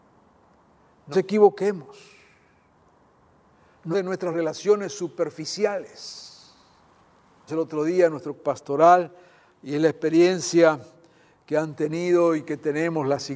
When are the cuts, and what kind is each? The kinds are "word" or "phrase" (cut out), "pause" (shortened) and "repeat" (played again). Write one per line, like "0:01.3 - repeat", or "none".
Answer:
0:01.1 - word
0:03.9 - word
0:04.3 - word
0:07.5 - word
0:08.4 - word